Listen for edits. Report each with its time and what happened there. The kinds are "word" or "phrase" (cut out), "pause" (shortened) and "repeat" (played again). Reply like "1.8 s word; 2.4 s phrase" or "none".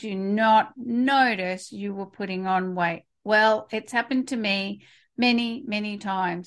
none